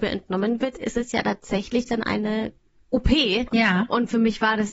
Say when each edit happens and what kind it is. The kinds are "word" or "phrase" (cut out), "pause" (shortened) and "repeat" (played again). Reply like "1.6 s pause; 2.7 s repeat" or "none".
none